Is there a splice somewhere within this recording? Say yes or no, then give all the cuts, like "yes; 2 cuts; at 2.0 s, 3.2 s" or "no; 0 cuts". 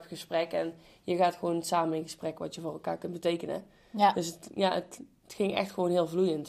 no; 0 cuts